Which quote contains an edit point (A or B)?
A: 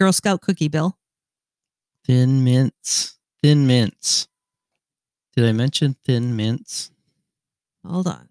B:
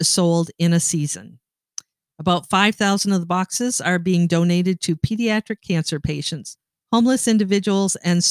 A